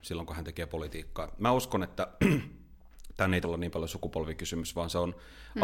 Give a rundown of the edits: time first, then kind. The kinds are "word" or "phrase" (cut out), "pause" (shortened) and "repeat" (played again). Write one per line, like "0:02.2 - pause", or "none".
0:03.4 - word

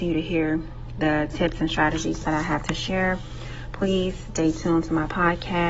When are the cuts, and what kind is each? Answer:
none

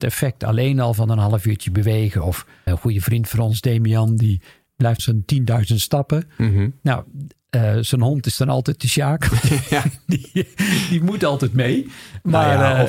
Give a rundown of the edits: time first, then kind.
0:02.7 - word
0:05.0 - phrase

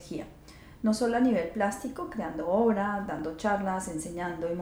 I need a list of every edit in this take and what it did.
none

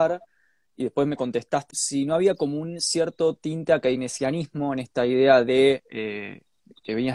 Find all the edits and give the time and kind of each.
0:01.7 - word

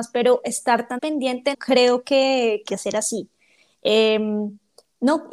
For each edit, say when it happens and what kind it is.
0:01.0 - word
0:01.5 - word
0:02.7 - word

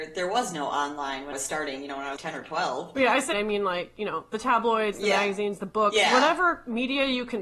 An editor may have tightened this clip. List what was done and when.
0:01.3 - word
0:02.2 - word
0:03.3 - word

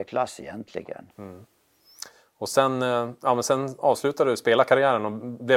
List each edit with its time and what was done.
0:01.1 - pause

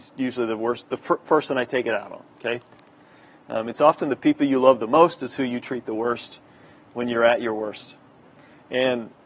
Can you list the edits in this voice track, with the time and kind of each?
0:01.3 - phrase

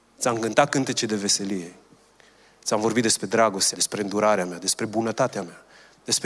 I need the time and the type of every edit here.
0:03.7 - word

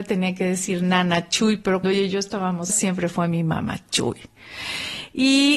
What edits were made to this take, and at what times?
0:01.8 - word
0:02.7 - word

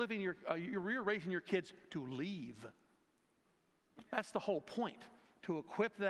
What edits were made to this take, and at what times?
none

